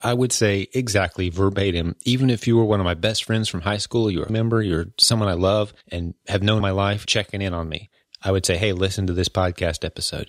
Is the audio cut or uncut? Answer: cut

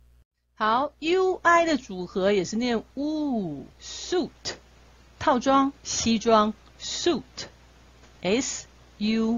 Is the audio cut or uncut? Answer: cut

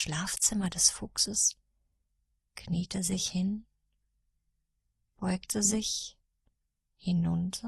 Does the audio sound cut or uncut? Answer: uncut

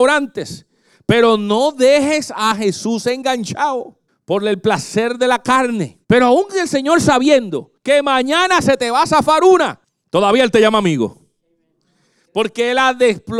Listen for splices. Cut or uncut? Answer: cut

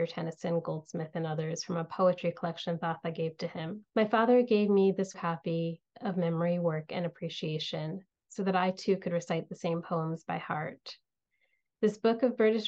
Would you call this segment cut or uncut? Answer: cut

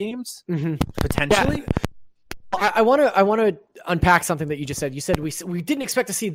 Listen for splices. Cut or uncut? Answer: uncut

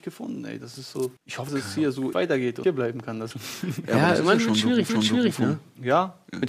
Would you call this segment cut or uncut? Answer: cut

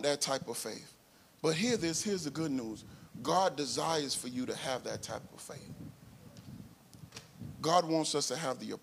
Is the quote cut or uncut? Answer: uncut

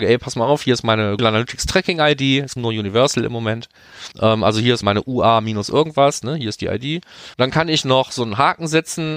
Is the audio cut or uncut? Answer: cut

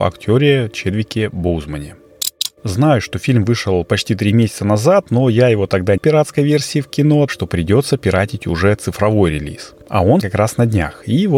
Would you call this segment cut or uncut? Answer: cut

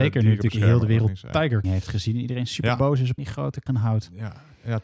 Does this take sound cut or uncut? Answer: cut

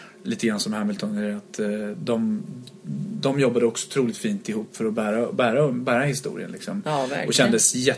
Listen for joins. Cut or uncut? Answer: uncut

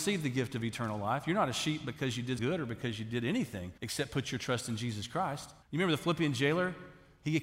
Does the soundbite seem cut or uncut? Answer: cut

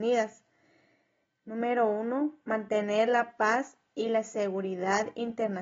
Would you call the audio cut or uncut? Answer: uncut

